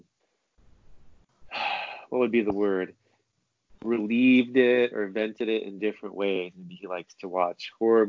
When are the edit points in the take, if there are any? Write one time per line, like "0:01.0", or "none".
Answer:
none

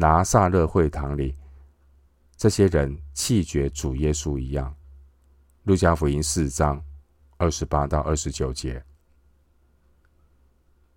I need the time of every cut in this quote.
none

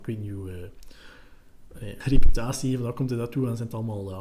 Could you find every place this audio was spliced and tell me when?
0:02.0

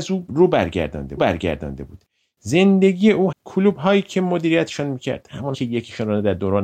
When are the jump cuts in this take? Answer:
0:01.2
0:03.3
0:05.5

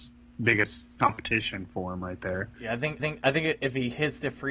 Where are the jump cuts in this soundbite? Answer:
0:02.5
0:03.0

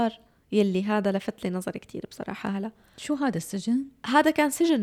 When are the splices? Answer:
none

